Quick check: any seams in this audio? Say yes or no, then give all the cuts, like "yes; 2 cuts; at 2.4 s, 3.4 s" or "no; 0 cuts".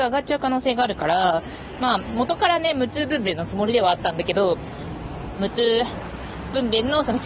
yes; 1 cut; at 5.4 s